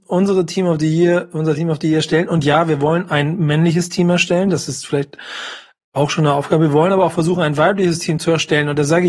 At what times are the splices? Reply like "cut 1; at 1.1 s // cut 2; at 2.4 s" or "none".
none